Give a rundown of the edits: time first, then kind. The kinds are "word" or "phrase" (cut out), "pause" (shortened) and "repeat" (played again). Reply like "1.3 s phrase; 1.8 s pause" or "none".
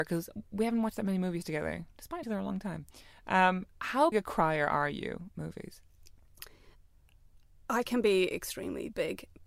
2.2 s word; 4.1 s word; 5.3 s word

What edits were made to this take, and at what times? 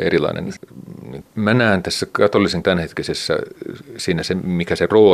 2.6 s word

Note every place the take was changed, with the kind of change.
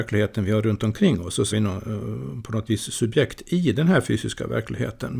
1.5 s word; 2.7 s word

